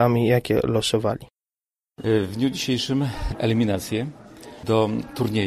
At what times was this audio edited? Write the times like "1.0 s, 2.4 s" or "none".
3.3 s